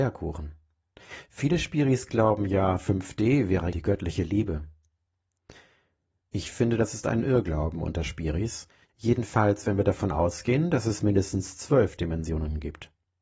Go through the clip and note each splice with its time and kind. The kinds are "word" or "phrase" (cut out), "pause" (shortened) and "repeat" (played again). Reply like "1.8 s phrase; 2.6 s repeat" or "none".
3.7 s phrase